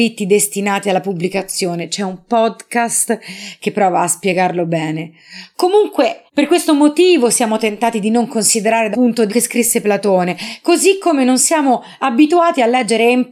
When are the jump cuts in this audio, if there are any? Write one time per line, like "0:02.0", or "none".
0:06.3
0:08.9
0:09.3